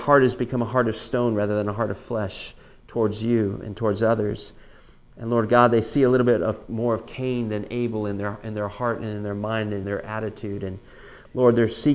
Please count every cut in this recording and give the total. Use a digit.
1